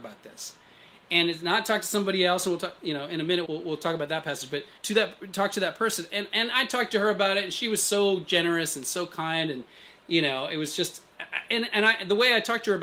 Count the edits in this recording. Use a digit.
2